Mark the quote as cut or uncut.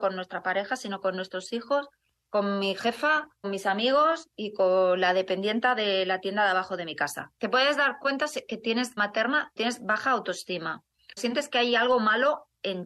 cut